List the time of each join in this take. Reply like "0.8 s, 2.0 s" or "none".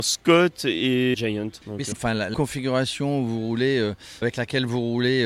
1.1 s, 1.6 s, 1.9 s, 2.3 s, 4.2 s